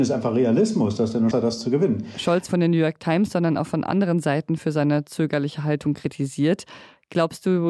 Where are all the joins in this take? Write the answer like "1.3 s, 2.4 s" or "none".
1.3 s, 2.5 s